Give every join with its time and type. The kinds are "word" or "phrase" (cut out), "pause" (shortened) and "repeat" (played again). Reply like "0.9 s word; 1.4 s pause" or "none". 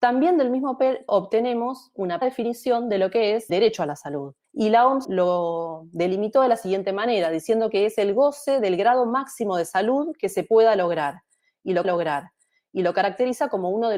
1.1 s word; 2.2 s word; 3.5 s word; 4.4 s pause; 5.0 s word; 11.8 s repeat